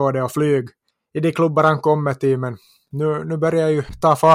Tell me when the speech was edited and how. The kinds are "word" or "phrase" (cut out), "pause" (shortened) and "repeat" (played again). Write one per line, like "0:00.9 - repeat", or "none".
0:00.9 - pause